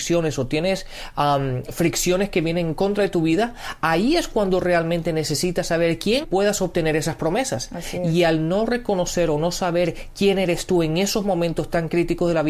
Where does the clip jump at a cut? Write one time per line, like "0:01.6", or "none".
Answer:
0:06.2